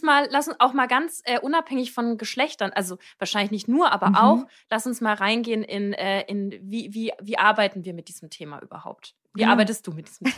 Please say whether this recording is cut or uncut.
uncut